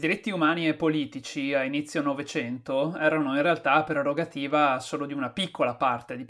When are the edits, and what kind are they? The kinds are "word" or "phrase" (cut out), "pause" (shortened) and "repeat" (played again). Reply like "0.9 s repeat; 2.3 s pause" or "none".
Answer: none